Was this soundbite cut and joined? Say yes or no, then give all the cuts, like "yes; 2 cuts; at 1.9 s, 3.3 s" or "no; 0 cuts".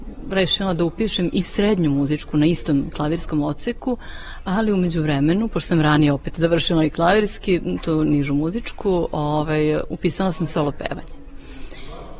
no; 0 cuts